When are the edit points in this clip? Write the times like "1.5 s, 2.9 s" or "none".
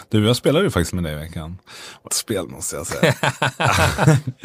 0.9 s, 2.1 s